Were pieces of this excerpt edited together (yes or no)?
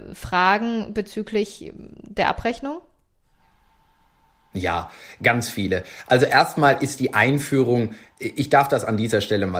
no